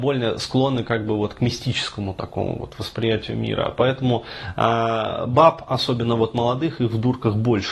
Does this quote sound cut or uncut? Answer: uncut